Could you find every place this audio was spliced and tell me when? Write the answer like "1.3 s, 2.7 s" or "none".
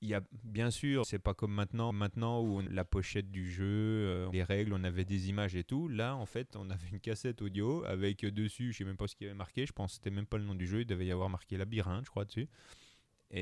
1.0 s, 1.9 s, 2.7 s, 4.3 s